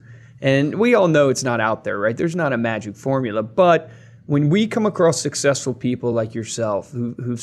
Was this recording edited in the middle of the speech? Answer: no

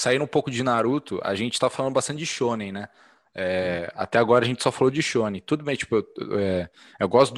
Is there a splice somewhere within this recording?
no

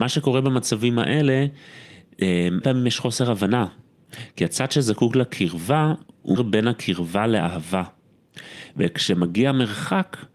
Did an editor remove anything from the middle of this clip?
yes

